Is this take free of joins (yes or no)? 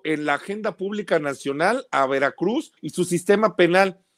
no